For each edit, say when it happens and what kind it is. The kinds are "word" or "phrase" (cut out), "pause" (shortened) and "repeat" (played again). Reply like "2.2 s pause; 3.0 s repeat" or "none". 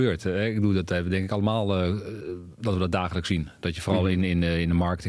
none